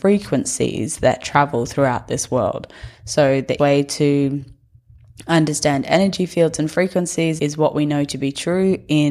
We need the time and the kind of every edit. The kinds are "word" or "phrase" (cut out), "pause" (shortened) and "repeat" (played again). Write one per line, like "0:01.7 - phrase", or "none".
0:03.6 - word
0:07.4 - word